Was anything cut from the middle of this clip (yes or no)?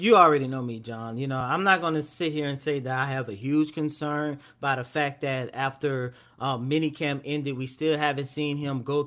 no